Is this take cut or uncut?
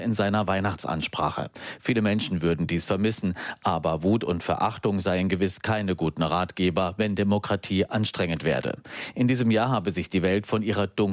uncut